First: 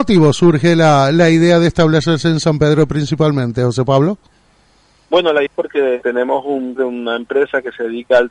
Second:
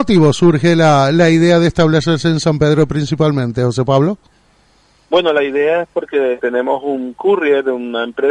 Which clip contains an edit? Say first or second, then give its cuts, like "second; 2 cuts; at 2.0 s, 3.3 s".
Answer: first; 2 cuts; at 5.5 s, 6.8 s